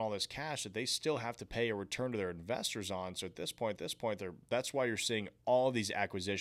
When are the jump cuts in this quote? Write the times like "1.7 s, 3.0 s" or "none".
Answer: 3.8 s

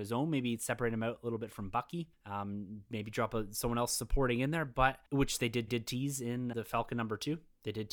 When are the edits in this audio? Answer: 2.1 s, 5.1 s, 5.7 s, 6.5 s

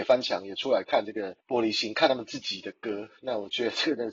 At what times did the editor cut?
1.4 s

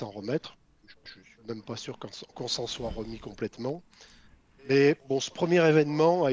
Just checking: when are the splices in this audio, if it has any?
1.1 s, 5.0 s

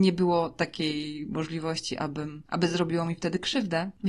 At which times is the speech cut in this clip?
none

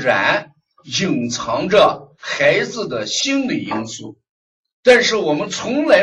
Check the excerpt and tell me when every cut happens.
4.6 s

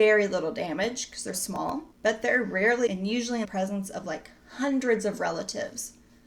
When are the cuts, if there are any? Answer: 1.3 s, 1.9 s, 2.9 s, 3.4 s, 4.4 s

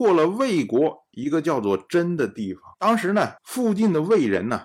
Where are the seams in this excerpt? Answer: 2.7 s, 3.4 s

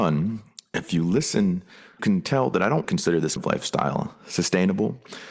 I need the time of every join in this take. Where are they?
2.0 s, 2.8 s, 3.4 s

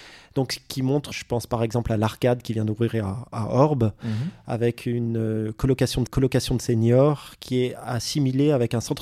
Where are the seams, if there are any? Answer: 1.1 s, 6.1 s

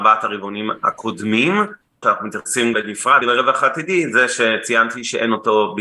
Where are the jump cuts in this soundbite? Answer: 2.0 s, 2.7 s, 3.2 s

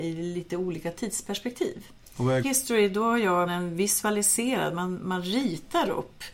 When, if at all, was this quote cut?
2.4 s, 3.5 s

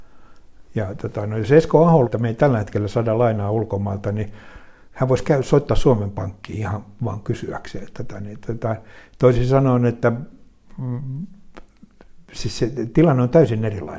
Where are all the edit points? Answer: 2.0 s

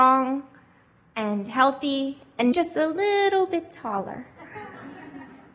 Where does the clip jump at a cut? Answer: 2.5 s

